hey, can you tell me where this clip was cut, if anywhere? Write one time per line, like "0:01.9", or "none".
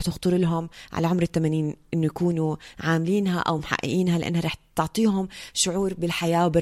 none